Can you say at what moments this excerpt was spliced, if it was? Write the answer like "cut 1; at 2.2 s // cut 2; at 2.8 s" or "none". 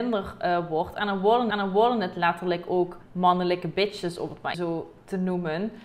cut 1; at 1.5 s // cut 2; at 3.0 s // cut 3; at 4.5 s